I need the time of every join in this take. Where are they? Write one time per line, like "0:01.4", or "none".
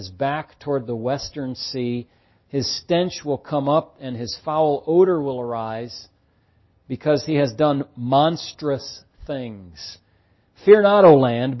none